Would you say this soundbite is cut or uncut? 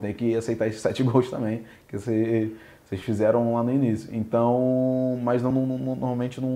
uncut